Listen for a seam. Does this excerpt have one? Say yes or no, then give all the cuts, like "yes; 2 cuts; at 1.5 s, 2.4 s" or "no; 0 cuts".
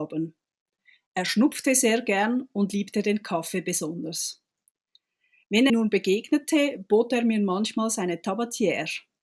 yes; 1 cut; at 5.7 s